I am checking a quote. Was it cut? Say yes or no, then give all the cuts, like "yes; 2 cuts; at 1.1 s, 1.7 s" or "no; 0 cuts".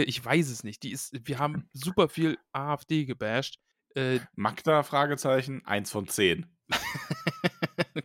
no; 0 cuts